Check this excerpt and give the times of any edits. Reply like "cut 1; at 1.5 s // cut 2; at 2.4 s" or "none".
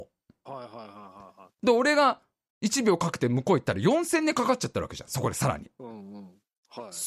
none